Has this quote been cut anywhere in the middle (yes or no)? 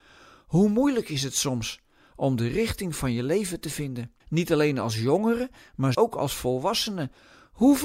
yes